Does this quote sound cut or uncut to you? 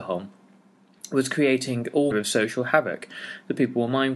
cut